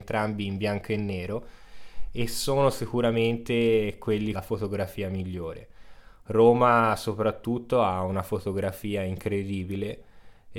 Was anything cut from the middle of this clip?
yes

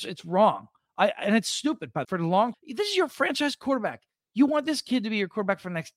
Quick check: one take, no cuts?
no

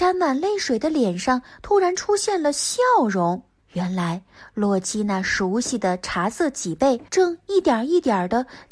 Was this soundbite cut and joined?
yes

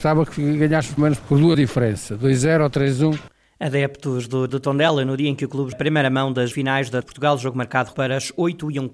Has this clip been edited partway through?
yes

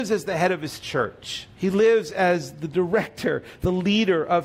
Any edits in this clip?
yes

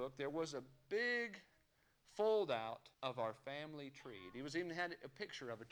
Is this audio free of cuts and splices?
no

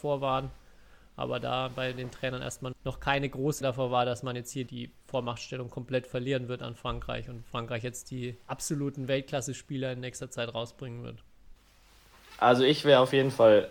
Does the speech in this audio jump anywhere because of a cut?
yes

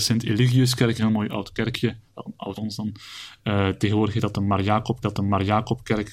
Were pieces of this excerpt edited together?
yes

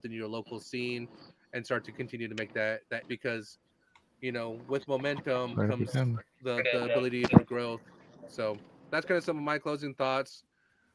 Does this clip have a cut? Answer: yes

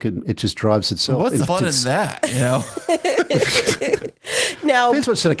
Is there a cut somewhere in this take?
yes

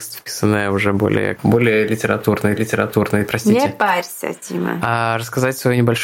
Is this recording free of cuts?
no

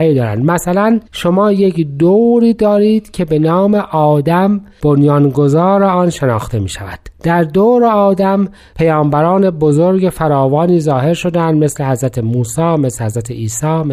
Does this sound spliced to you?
no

